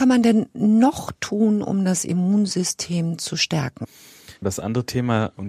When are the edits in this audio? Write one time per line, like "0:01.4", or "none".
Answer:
0:04.4